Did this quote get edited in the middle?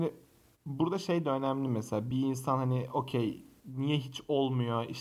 no; 0 cuts

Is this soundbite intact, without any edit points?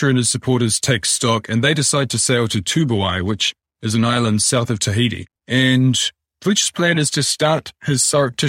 no; 1 cut; at 5.4 s

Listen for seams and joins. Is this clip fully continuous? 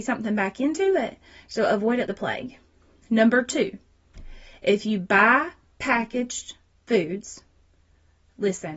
no; 2 cuts; at 2.1 s, 6.7 s

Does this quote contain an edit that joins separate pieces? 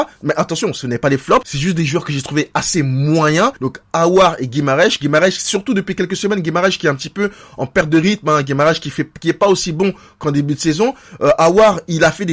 yes; 1 cut; at 3.6 s

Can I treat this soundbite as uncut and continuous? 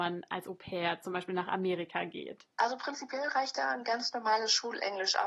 no; 1 cut; at 2.5 s

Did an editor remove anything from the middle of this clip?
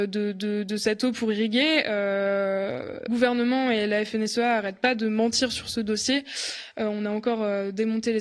yes; 1 cut; at 3.1 s

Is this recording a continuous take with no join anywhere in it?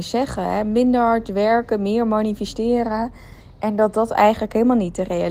yes; 0 cuts

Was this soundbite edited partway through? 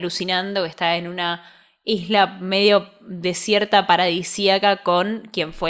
no; 0 cuts

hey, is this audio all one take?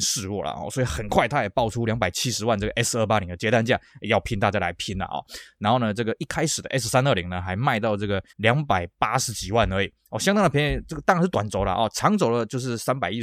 no; 1 cut; at 8.3 s

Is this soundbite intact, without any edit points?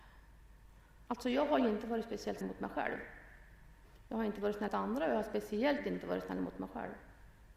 no; 2 cuts; at 2.4 s, 4.7 s

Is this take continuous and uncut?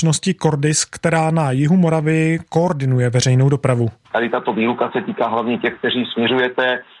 yes; 0 cuts

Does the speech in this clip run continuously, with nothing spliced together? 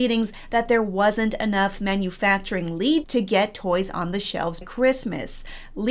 no; 2 cuts; at 3.0 s, 4.6 s

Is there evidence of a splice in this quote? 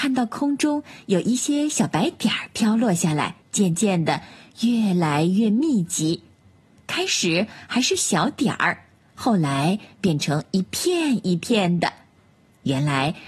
yes; 1 cut; at 3.4 s

